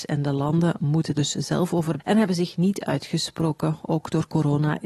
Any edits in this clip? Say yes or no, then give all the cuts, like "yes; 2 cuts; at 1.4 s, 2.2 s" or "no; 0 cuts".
yes; 2 cuts; at 1.1 s, 2.0 s